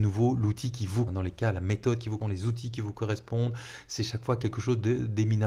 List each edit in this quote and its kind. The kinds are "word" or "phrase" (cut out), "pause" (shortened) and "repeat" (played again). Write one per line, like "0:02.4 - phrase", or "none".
0:01.1 - word
0:02.2 - word